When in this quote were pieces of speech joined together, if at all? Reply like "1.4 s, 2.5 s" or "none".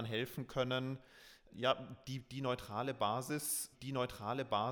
1.5 s, 3.7 s